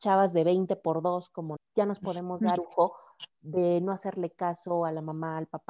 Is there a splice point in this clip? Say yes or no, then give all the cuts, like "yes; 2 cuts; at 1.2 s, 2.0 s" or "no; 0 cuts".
yes; 2 cuts; at 1.6 s, 2.6 s